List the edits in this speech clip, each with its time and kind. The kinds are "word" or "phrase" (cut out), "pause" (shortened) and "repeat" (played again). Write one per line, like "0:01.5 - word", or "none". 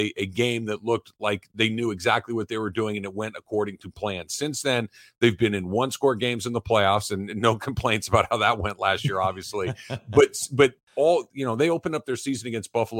none